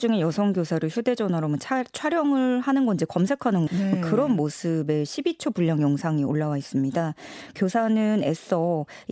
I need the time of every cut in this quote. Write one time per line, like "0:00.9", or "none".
0:03.7